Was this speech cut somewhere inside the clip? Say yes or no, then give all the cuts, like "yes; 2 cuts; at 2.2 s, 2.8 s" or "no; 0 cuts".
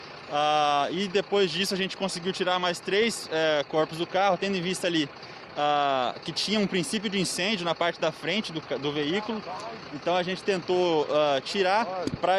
no; 0 cuts